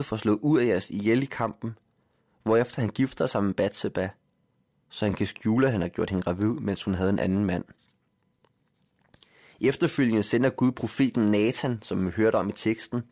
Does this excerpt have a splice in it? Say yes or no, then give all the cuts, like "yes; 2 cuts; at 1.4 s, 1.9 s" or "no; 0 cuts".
no; 0 cuts